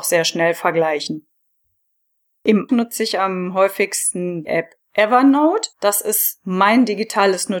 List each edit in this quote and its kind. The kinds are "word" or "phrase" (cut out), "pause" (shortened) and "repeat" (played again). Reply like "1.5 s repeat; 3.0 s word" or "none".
2.7 s word; 4.5 s word; 5.7 s pause